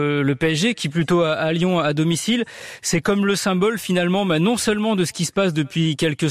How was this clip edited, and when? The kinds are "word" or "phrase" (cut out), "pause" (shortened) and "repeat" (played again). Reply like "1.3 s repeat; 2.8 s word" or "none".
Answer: 0.9 s phrase